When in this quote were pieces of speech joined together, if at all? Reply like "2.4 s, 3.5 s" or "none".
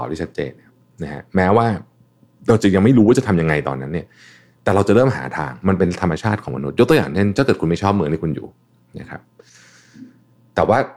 none